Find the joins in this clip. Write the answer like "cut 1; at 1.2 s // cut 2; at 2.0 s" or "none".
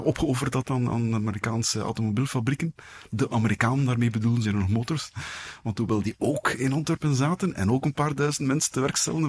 cut 1; at 4.4 s